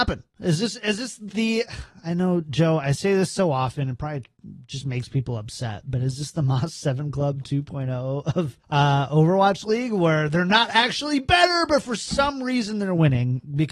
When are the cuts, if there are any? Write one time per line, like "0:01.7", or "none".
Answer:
0:01.3
0:08.6